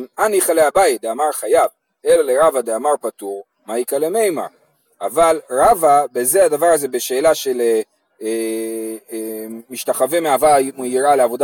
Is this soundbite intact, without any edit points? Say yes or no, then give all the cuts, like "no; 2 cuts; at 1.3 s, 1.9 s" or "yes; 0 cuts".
yes; 0 cuts